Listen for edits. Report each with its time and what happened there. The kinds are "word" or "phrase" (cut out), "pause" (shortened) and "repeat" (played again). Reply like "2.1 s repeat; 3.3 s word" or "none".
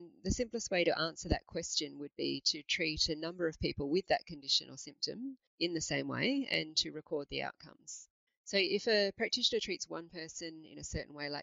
5.5 s pause; 8.3 s pause